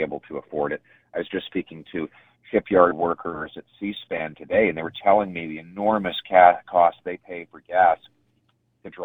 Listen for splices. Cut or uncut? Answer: uncut